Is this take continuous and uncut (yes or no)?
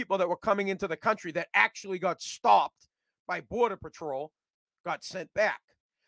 yes